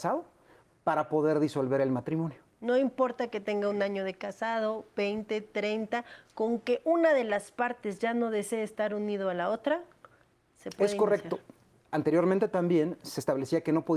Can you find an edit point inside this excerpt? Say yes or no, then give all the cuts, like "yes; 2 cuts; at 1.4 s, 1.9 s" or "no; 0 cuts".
no; 0 cuts